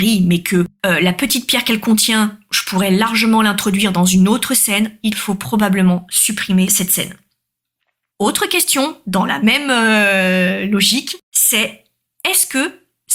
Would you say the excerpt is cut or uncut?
cut